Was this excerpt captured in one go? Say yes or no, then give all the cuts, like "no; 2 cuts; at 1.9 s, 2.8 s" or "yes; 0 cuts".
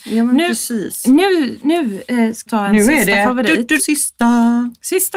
no; 2 cuts; at 2.5 s, 3.8 s